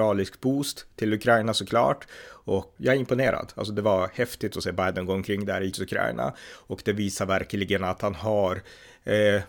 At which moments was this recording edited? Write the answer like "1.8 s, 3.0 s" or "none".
2.8 s, 5.7 s